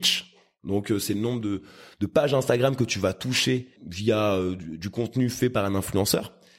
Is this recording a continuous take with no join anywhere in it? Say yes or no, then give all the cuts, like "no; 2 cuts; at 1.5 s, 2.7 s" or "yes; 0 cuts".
yes; 0 cuts